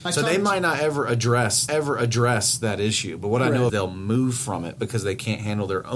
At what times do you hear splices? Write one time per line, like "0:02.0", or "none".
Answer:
0:01.7
0:03.7